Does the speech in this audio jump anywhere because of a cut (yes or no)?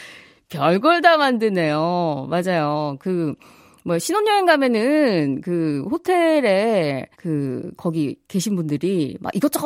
yes